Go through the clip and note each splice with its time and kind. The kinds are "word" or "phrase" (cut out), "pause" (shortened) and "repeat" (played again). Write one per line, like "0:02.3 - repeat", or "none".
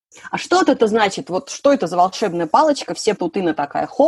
0:03.2 - word